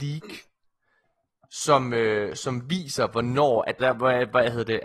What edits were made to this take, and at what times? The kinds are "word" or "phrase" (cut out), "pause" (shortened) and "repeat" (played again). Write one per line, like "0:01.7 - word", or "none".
0:03.8 - phrase